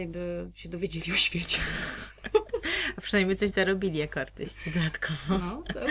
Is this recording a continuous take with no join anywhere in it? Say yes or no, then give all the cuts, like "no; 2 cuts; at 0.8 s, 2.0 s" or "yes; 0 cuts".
yes; 0 cuts